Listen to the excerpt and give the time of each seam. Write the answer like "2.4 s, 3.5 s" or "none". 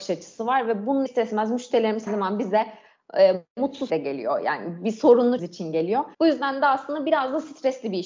1.1 s, 2.1 s, 3.9 s, 5.4 s, 6.1 s